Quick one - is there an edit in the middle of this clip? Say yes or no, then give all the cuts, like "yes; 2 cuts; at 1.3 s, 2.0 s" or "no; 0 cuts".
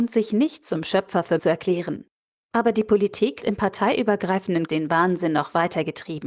yes; 3 cuts; at 1.4 s, 3.4 s, 4.7 s